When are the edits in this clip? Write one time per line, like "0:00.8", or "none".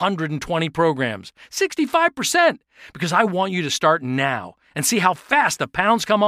none